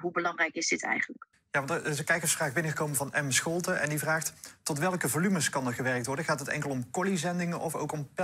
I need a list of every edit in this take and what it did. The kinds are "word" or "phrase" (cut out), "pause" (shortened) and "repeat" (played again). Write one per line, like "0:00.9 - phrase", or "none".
0:01.3 - pause